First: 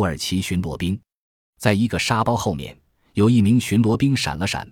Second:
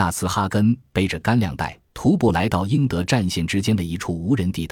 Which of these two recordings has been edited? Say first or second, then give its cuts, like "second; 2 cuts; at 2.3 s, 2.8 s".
second; 1 cut; at 1.9 s